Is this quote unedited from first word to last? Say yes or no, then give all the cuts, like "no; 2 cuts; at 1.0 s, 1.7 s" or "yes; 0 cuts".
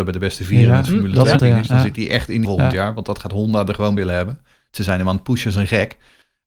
no; 3 cuts; at 1.4 s, 2.4 s, 4.0 s